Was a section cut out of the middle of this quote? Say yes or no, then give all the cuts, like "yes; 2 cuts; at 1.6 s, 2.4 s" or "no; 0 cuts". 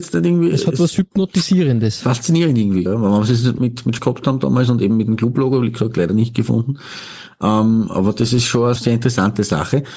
yes; 4 cuts; at 2.9 s, 3.6 s, 4.0 s, 8.8 s